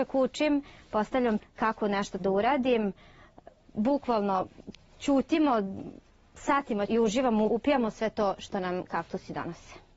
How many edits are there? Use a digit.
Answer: 5